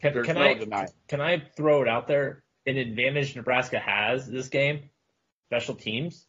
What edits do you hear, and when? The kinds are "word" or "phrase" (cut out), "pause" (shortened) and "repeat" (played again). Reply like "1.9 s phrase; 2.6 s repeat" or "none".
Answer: 1.0 s pause